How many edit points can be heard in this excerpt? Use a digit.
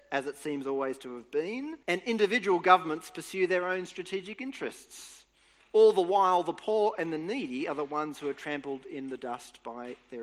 1